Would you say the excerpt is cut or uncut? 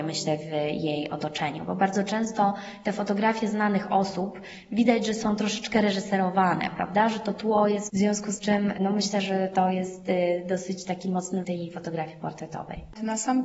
cut